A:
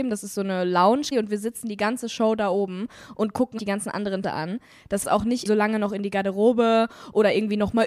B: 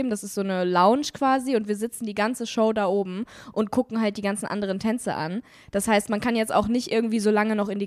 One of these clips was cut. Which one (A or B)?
A